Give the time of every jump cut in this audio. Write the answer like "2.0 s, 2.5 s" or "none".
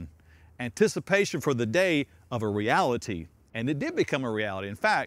none